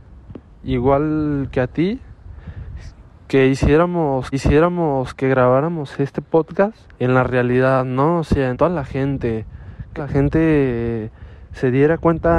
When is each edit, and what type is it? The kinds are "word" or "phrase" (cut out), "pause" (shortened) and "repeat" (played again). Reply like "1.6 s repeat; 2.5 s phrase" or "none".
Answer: 4.3 s repeat; 6.9 s pause; 8.5 s word; 10.0 s word